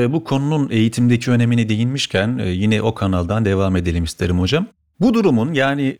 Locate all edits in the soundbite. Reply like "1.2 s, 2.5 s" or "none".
none